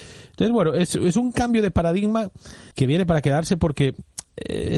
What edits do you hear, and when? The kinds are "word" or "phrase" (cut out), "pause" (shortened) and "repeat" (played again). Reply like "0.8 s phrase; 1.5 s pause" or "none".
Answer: 2.7 s pause